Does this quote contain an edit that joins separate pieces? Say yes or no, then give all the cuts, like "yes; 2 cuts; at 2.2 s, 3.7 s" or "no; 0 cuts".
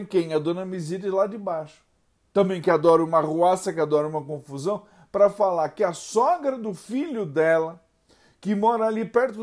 no; 0 cuts